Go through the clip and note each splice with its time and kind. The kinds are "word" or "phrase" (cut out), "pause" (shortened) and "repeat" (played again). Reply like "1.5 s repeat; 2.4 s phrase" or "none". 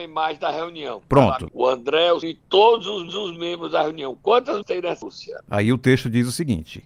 1.5 s word; 2.2 s word; 3.1 s repeat; 4.6 s word; 5.0 s word